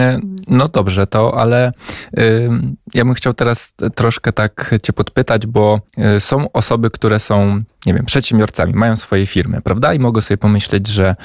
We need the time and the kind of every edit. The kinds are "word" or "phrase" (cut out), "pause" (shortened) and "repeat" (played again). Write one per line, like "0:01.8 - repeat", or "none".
0:05.9 - pause